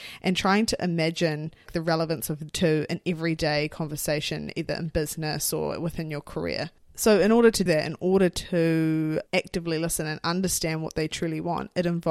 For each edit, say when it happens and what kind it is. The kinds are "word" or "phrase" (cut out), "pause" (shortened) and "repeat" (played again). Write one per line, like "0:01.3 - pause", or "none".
0:01.7 - phrase
0:02.5 - word
0:07.7 - word
0:09.3 - pause